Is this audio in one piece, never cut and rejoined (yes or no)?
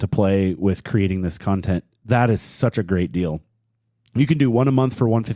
yes